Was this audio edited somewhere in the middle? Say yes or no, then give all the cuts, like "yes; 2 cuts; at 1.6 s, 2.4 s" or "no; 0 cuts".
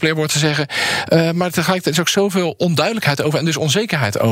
no; 0 cuts